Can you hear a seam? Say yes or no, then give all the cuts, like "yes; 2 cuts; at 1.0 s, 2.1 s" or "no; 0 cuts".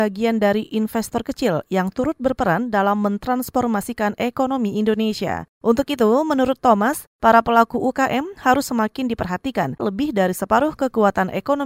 yes; 1 cut; at 9.8 s